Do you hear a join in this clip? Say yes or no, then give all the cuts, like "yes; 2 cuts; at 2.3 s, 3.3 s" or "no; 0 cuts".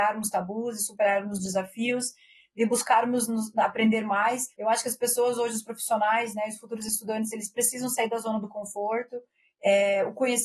yes; 1 cut; at 4.5 s